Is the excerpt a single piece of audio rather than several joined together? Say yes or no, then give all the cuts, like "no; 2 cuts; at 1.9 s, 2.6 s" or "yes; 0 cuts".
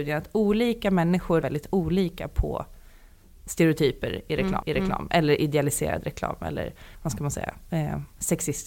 no; 2 cuts; at 1.4 s, 4.6 s